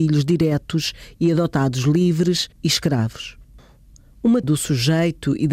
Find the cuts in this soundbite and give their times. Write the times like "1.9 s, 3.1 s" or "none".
2.5 s, 4.4 s